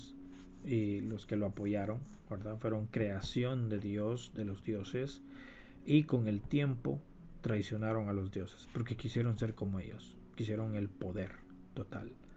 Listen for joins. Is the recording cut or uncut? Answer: uncut